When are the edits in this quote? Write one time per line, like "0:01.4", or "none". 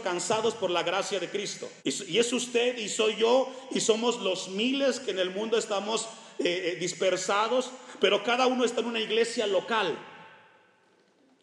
0:01.8